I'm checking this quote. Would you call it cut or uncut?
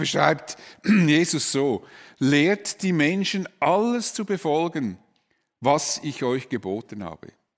uncut